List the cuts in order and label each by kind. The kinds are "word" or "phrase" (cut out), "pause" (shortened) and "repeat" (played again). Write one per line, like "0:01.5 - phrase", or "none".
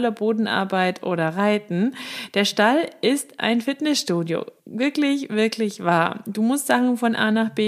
0:04.6 - pause